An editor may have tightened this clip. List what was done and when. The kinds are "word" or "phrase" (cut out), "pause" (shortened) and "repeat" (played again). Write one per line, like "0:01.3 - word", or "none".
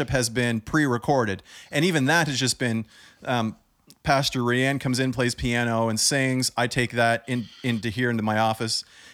none